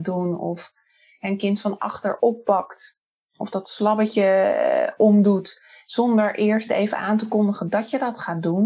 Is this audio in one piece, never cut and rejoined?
yes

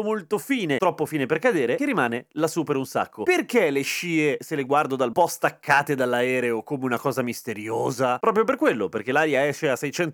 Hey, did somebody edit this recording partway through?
yes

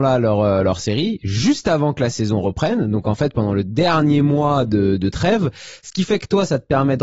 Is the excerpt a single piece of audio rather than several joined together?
yes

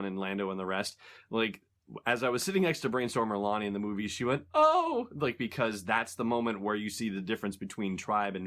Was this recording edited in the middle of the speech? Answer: no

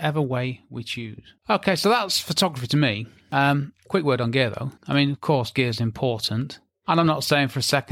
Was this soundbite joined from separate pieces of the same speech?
yes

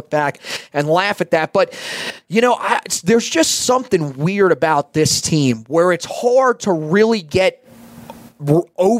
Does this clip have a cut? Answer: no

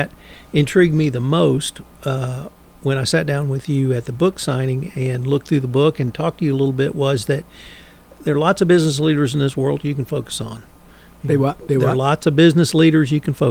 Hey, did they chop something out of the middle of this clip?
no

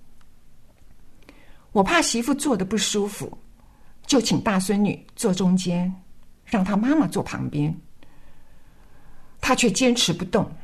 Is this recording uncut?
yes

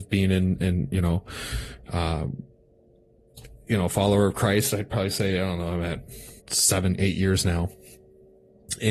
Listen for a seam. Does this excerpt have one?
yes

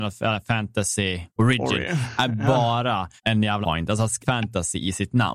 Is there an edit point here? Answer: yes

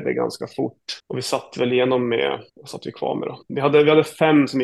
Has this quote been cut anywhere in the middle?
yes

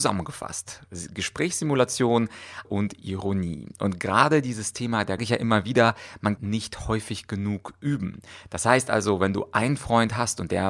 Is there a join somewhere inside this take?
yes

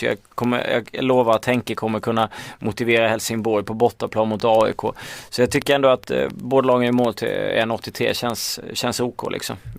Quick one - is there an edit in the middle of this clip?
no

